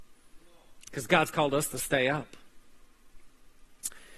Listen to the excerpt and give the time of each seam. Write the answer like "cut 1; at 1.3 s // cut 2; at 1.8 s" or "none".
none